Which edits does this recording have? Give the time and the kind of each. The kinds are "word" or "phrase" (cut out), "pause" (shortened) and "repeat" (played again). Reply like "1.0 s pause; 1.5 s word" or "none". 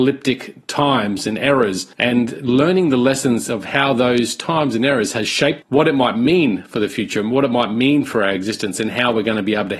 1.9 s pause; 5.6 s phrase